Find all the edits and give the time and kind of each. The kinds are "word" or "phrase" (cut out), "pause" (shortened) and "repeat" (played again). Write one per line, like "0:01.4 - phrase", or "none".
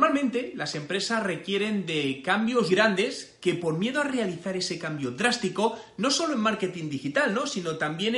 0:02.7 - word

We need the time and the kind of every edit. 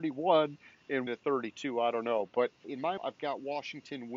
0:01.1 - word
0:02.6 - word
0:03.0 - word

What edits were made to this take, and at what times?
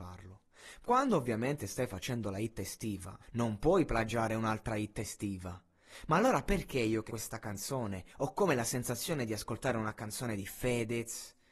0:03.2 - pause
0:07.1 - word
0:08.1 - pause

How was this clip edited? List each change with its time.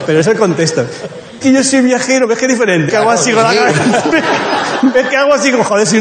0:01.4 - word
0:02.9 - word

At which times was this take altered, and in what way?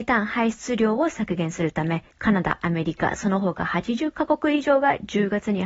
0:02.1 - pause

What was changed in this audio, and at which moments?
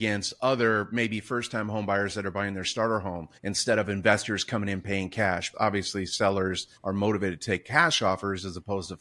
0:03.4 - pause
0:05.5 - word
0:06.8 - pause

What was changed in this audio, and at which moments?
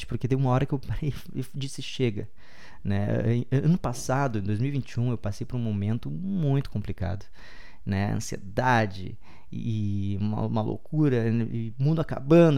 none

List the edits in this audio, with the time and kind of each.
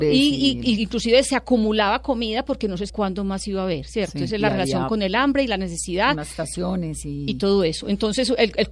0:02.9 - word

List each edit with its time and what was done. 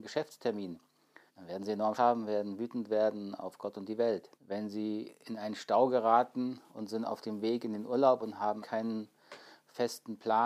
0:01.3 - pause
0:01.9 - word
0:04.4 - pause
0:06.7 - pause
0:08.6 - word

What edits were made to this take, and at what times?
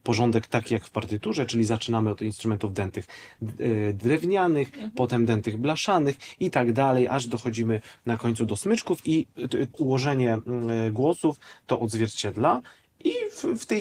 0:09.7 - word

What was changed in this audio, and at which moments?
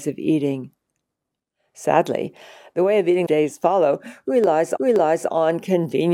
0:03.3 - phrase
0:04.8 - repeat

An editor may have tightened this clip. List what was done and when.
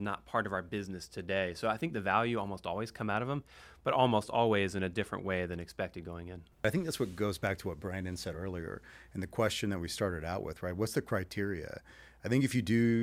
none

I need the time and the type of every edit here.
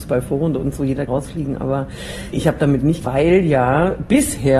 0:01.1 - word
0:02.3 - word
0:03.0 - word

